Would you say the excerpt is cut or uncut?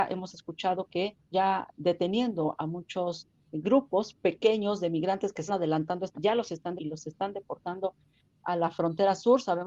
cut